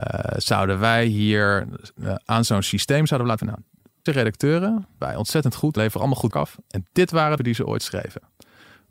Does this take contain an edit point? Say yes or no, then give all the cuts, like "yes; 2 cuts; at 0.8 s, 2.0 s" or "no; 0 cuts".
yes; 6 cuts; at 3.4 s, 4.1 s, 5.0 s, 5.8 s, 6.3 s, 7.4 s